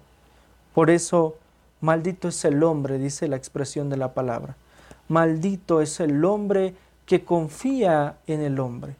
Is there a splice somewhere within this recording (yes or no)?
no